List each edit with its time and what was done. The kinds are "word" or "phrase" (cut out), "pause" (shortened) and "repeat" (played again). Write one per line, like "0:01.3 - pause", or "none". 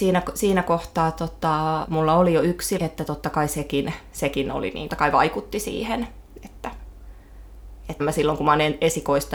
0:01.8 - word
0:02.8 - word
0:04.9 - phrase
0:08.0 - word